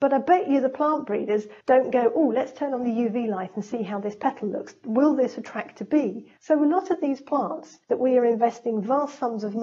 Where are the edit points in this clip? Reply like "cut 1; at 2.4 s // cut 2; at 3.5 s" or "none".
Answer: cut 1; at 1.6 s // cut 2; at 6.4 s // cut 3; at 7.8 s